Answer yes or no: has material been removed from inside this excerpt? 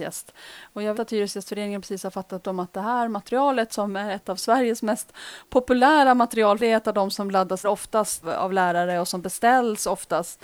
yes